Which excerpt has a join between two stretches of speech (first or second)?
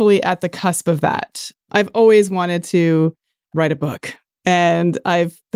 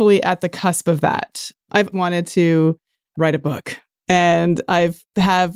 second